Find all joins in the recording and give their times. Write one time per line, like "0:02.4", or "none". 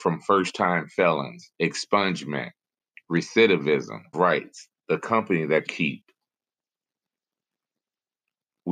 0:01.5
0:04.1
0:04.8
0:05.7